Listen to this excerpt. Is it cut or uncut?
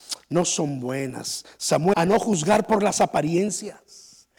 cut